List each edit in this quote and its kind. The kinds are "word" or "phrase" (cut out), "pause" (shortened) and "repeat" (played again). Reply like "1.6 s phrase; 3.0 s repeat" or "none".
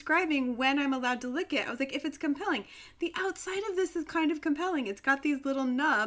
none